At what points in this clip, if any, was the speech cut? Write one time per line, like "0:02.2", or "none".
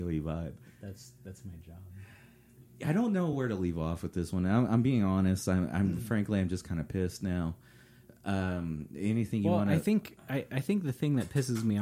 none